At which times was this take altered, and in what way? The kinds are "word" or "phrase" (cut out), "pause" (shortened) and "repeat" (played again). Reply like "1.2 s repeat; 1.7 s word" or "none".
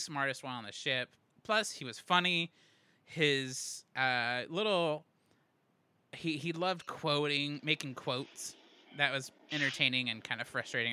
none